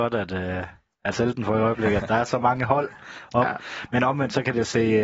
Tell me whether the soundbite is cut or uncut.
cut